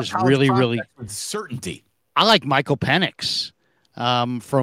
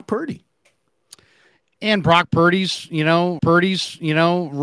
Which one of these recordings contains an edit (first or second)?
second